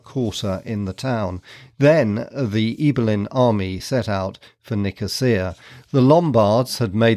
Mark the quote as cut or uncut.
uncut